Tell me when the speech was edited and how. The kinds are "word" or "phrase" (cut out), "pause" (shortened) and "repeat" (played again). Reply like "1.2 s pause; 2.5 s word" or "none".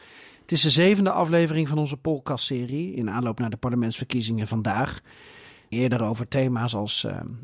5.7 s word